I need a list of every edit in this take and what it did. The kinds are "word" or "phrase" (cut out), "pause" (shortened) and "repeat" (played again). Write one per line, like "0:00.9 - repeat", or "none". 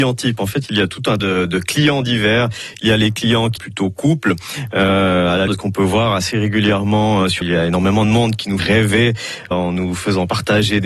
0:01.2 - word
0:03.6 - word
0:05.5 - word
0:07.4 - word
0:08.6 - word
0:09.5 - word